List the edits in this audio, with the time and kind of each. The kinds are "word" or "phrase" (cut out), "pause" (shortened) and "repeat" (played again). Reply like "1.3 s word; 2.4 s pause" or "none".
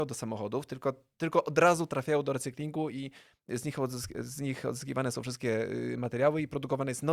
none